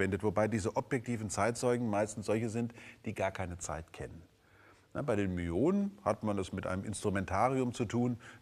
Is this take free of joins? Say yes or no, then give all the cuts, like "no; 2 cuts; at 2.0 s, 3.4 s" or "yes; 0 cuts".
yes; 0 cuts